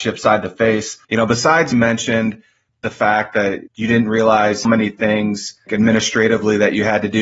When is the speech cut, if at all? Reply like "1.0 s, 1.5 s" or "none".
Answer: 1.0 s, 1.7 s, 2.7 s, 3.7 s, 4.6 s, 5.7 s